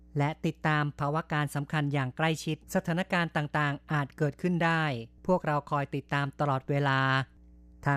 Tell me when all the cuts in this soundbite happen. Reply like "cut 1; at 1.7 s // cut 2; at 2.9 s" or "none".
cut 1; at 2.6 s